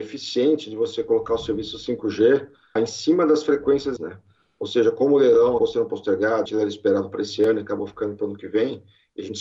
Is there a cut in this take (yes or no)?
yes